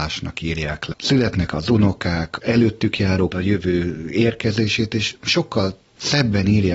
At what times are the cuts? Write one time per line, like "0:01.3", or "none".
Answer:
0:00.9
0:01.5
0:02.4
0:03.3

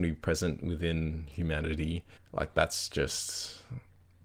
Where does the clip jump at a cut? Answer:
0:02.2

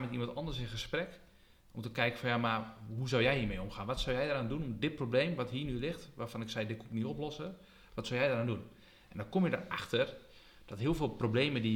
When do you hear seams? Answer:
none

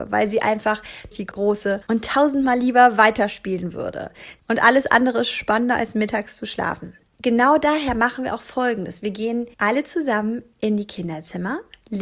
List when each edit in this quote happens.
0:01.1
0:09.5

